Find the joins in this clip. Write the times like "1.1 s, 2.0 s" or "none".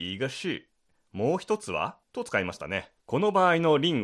2.0 s, 3.0 s